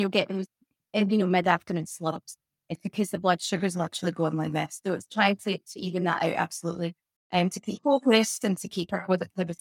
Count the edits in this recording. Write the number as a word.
zero